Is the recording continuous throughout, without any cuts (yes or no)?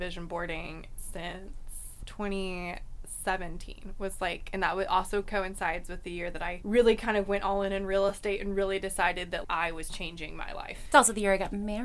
yes